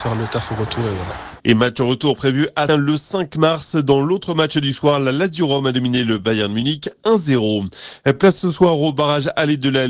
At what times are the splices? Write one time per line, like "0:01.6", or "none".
0:02.7